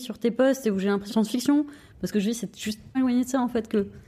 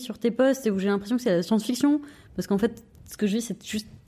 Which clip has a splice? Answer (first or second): first